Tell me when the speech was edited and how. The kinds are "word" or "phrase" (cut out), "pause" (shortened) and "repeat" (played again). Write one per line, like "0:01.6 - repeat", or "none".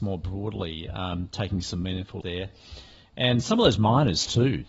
0:02.2 - word